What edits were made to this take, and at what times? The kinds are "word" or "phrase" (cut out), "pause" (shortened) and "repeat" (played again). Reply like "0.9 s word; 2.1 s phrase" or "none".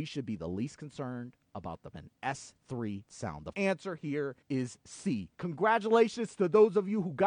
1.9 s phrase; 3.1 s word; 3.5 s word; 4.4 s pause; 5.3 s pause